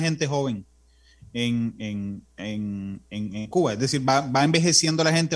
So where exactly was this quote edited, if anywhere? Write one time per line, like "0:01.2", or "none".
none